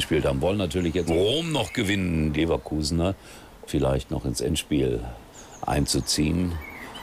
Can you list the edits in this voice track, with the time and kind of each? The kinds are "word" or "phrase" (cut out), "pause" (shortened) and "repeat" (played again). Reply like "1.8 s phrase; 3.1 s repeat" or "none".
1.1 s phrase; 2.3 s word; 3.7 s word